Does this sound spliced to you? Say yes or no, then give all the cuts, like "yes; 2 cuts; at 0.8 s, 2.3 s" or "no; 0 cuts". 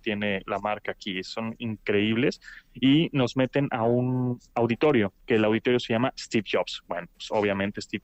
no; 0 cuts